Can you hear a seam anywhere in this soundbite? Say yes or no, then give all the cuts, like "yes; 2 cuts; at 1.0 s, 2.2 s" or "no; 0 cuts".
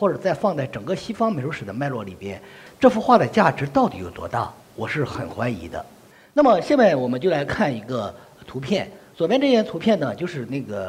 yes; 2 cuts; at 4.6 s, 6.1 s